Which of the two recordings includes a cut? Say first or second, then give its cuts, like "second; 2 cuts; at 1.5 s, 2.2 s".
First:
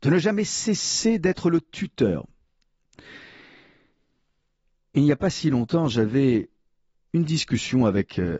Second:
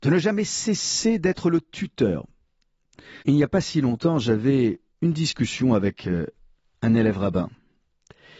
second; 2 cuts; at 3.2 s, 4.9 s